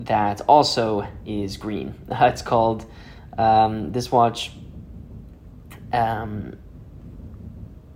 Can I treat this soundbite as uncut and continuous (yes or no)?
yes